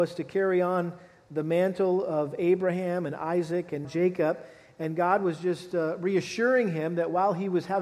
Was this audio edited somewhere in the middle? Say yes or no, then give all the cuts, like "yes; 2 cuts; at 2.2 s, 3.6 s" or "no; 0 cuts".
yes; 1 cut; at 3.8 s